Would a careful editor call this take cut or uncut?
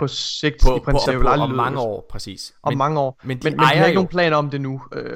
cut